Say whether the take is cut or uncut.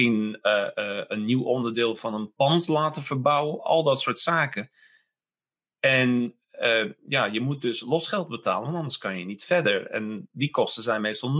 uncut